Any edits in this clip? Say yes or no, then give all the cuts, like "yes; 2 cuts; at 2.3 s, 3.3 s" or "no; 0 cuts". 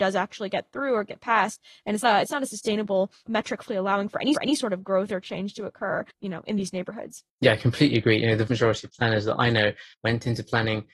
yes; 7 cuts; at 2.0 s, 3.7 s, 4.3 s, 6.1 s, 7.3 s, 8.5 s, 9.9 s